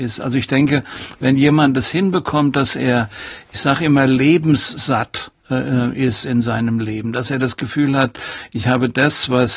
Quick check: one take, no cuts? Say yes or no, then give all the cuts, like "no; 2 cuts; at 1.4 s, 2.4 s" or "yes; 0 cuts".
no; 1 cut; at 5.4 s